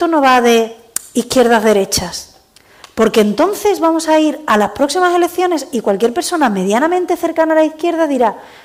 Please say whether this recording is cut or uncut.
uncut